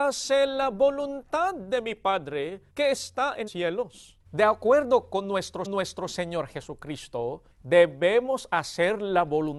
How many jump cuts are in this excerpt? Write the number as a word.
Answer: five